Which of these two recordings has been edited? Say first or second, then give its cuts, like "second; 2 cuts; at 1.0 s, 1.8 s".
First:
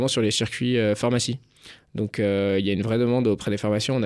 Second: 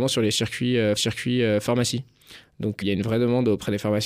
second; 2 cuts; at 1.0 s, 2.8 s